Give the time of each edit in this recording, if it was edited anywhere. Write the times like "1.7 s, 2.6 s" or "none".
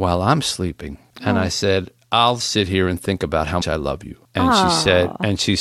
2.4 s, 3.6 s